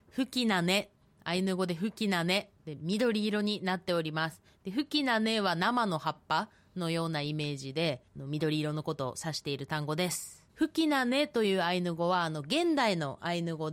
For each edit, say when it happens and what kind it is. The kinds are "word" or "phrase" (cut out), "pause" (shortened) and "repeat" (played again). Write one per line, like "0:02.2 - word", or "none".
0:01.0 - pause
0:08.1 - pause
0:10.5 - pause